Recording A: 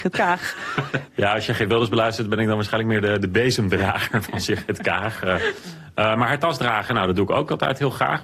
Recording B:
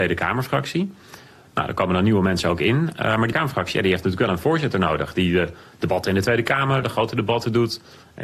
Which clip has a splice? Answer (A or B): B